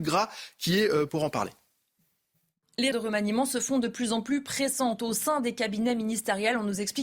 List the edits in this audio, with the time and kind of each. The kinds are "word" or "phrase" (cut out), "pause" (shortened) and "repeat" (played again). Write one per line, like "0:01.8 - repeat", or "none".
0:01.1 - word
0:02.9 - word